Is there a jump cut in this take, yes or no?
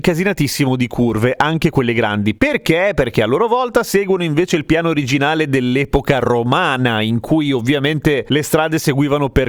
no